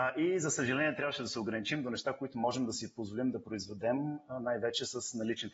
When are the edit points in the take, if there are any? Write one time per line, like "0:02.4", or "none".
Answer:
none